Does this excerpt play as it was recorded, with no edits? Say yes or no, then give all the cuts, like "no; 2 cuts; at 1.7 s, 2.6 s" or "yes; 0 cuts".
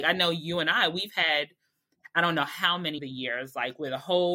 no; 1 cut; at 3.0 s